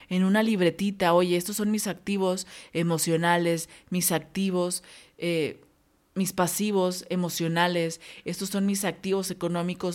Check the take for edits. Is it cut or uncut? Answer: uncut